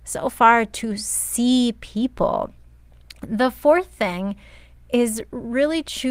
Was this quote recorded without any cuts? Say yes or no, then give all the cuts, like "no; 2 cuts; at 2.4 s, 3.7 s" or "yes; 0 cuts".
yes; 0 cuts